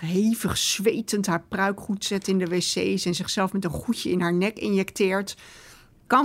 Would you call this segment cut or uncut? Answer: uncut